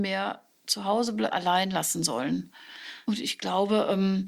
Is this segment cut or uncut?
cut